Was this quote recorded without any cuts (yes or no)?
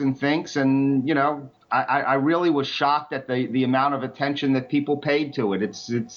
yes